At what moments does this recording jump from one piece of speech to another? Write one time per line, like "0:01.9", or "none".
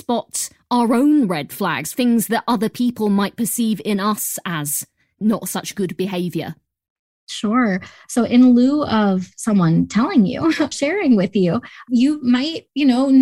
0:10.7